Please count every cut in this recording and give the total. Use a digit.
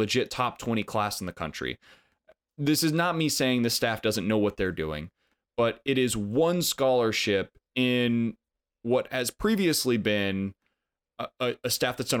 0